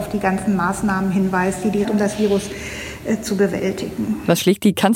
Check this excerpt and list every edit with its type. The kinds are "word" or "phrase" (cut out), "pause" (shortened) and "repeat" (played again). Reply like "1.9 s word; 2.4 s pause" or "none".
1.8 s phrase